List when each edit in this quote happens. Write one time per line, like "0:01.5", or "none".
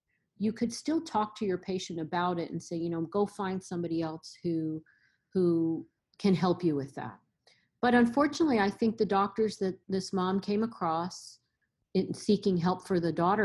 0:09.8